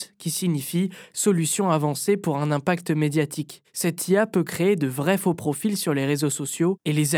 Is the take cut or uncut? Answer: uncut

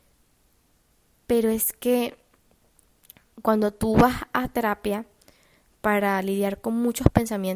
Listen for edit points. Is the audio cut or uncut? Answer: uncut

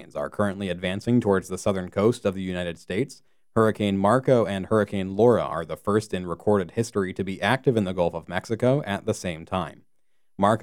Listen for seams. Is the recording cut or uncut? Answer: uncut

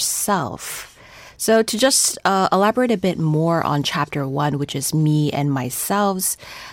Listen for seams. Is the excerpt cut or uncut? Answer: uncut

